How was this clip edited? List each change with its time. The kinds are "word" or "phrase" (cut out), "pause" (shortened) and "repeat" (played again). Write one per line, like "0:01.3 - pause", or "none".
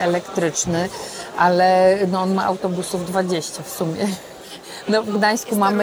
none

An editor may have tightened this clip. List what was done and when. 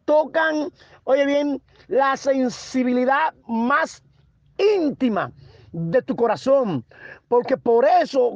0:03.4 - pause

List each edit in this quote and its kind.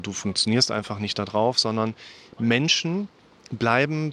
none

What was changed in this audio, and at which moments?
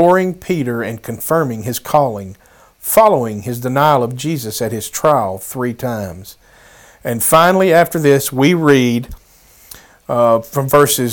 none

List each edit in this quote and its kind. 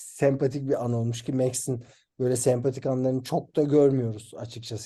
none

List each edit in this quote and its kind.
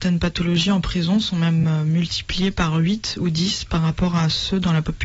none

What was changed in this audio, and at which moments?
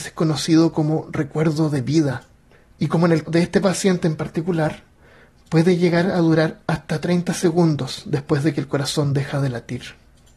0:02.5 - pause
0:03.3 - word

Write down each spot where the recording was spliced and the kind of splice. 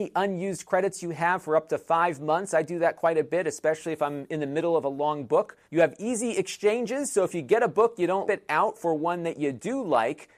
0:05.6 - pause
0:08.3 - phrase

